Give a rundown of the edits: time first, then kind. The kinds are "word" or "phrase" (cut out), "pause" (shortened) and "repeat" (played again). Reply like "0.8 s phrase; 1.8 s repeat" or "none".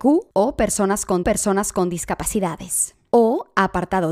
1.2 s repeat